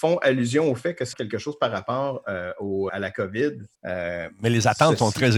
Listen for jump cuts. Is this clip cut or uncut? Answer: cut